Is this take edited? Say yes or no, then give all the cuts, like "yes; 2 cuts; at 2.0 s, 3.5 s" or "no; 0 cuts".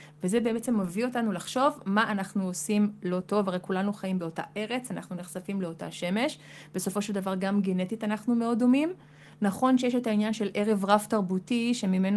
no; 0 cuts